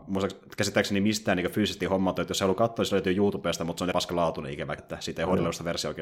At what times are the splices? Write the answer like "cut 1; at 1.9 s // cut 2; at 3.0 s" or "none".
cut 1; at 3.9 s // cut 2; at 4.8 s